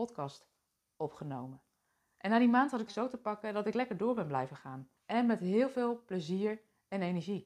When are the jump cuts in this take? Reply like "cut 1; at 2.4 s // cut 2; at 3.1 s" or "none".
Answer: cut 1; at 2.9 s // cut 2; at 5.0 s

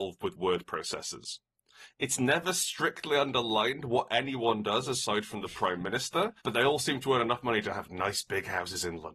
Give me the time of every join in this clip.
cut 1; at 6.4 s

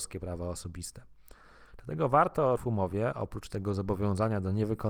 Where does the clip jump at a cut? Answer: cut 1; at 2.6 s

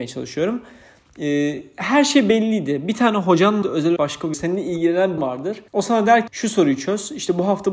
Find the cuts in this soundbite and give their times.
cut 1; at 3.6 s // cut 2; at 4.0 s // cut 3; at 4.3 s // cut 4; at 5.2 s // cut 5; at 5.7 s // cut 6; at 6.3 s

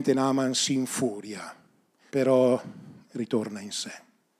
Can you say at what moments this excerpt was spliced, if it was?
cut 1; at 2.1 s

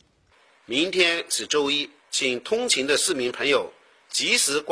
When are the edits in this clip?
cut 1; at 2.0 s

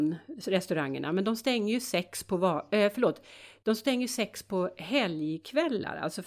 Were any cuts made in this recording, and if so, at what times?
none

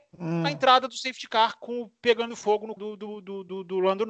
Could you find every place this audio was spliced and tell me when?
cut 1; at 2.8 s

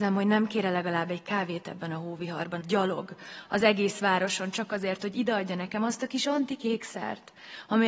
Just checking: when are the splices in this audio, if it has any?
cut 1; at 2.6 s

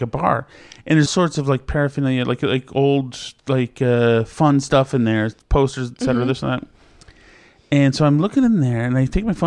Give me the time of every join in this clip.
cut 1; at 1.1 s // cut 2; at 3.4 s // cut 3; at 5.4 s

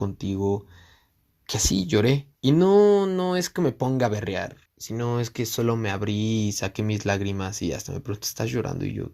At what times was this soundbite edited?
cut 1; at 2.4 s // cut 2; at 4.7 s

